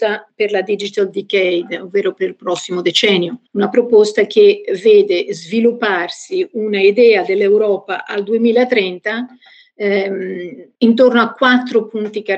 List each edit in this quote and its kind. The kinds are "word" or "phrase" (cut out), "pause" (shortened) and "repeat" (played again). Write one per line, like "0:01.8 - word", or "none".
0:03.5 - pause
0:10.7 - pause